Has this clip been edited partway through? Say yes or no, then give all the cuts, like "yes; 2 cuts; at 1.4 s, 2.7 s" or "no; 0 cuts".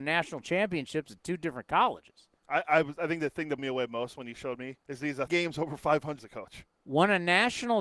yes; 5 cuts; at 2.4 s, 3.6 s, 4.8 s, 5.3 s, 6.2 s